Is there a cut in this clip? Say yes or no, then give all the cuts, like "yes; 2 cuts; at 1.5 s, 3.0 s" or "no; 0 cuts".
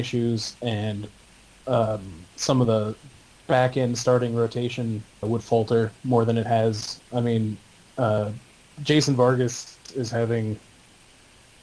yes; 1 cut; at 5.2 s